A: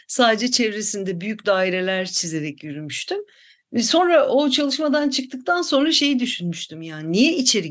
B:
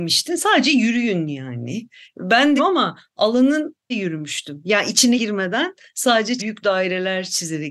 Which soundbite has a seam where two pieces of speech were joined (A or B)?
B